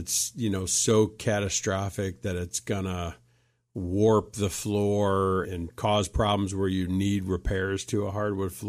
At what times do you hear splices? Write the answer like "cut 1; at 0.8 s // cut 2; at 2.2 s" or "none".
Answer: cut 1; at 5.4 s